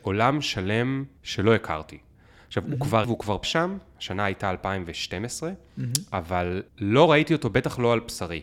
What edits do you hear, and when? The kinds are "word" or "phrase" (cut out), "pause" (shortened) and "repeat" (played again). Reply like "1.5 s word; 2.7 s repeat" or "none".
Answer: 1.2 s pause; 3.0 s word; 3.4 s word; 6.7 s pause